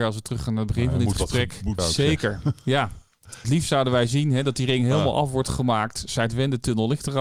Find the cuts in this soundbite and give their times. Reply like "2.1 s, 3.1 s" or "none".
1.8 s, 3.4 s